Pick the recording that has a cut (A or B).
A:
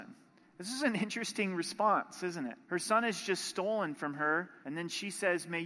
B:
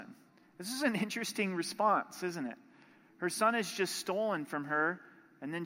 A